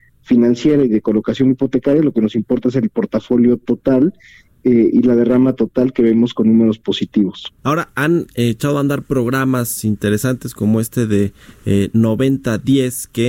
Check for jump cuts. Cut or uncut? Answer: cut